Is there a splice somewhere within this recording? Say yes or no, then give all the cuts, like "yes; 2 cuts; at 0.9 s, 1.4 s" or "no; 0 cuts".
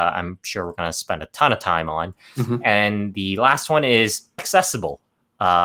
yes; 1 cut; at 4.4 s